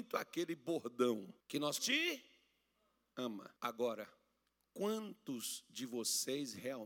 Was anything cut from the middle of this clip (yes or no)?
yes